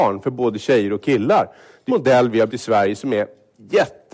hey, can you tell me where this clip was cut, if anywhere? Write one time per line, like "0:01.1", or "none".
0:01.9
0:02.5